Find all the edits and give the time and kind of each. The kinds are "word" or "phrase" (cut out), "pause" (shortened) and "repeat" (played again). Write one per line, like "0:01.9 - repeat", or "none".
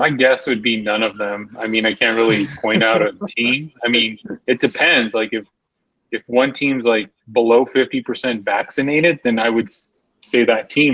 none